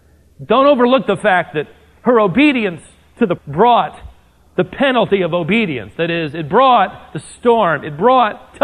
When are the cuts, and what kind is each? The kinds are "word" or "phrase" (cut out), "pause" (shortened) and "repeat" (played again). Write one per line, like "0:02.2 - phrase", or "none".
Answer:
0:03.4 - word